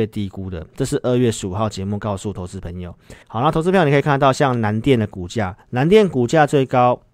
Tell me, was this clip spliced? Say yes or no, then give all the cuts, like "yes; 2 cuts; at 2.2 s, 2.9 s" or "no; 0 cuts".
yes; 2 cuts; at 3.2 s, 5.6 s